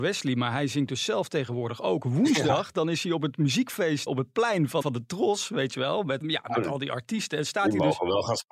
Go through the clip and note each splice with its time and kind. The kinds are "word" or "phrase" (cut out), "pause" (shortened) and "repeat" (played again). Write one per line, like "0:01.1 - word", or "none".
0:04.1 - word
0:04.8 - word
0:06.2 - word